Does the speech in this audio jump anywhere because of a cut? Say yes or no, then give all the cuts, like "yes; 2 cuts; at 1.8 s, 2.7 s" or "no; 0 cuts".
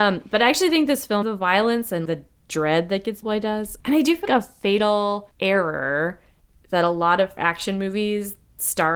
yes; 6 cuts; at 1.2 s, 2.1 s, 3.2 s, 4.2 s, 5.3 s, 7.4 s